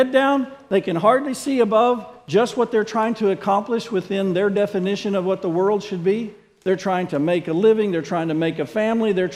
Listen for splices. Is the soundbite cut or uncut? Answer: uncut